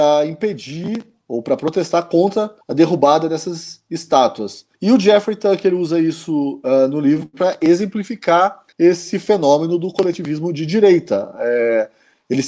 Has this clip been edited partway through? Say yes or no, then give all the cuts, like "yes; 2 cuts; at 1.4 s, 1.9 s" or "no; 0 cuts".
yes; 3 cuts; at 2.6 s, 4.7 s, 8.7 s